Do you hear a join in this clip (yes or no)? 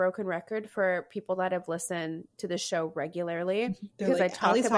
no